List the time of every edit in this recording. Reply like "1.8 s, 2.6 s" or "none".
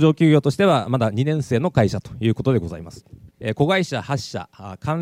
3.3 s